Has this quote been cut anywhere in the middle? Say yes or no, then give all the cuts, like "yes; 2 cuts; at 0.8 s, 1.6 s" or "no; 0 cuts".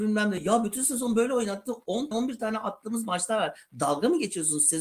yes; 1 cut; at 2.1 s